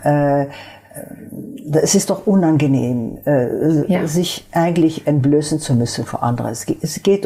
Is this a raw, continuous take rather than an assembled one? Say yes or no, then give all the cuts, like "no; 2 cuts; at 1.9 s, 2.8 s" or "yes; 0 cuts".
yes; 0 cuts